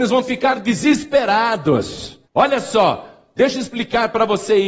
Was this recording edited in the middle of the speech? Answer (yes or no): yes